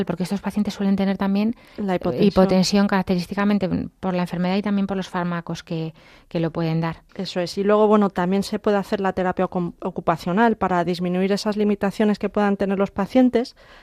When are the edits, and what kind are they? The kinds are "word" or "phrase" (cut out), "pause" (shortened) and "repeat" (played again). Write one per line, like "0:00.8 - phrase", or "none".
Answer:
0:07.1 - pause